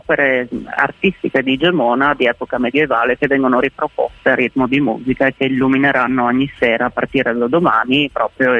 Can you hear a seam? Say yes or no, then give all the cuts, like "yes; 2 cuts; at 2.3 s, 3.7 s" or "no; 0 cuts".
no; 0 cuts